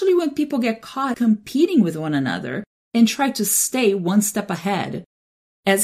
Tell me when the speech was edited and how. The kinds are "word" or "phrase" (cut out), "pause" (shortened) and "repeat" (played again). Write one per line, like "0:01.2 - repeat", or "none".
0:01.1 - word